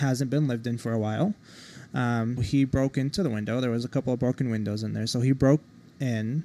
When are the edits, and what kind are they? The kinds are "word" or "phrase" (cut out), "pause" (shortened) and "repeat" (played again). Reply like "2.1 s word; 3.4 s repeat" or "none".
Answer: 2.4 s word